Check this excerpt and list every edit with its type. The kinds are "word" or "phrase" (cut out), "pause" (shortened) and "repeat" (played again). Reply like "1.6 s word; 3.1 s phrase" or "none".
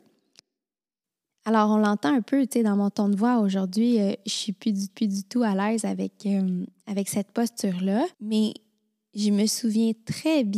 4.9 s repeat; 8.1 s pause